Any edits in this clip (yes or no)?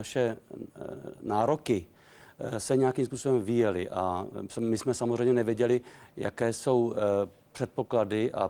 no